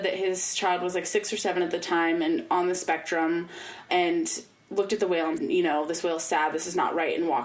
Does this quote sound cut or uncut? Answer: cut